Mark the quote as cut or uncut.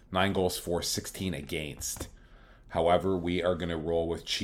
uncut